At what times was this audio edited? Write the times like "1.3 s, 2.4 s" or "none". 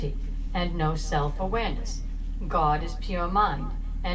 none